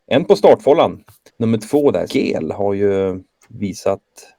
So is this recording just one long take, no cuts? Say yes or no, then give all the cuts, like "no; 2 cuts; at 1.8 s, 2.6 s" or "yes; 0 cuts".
no; 2 cuts; at 1.3 s, 2.1 s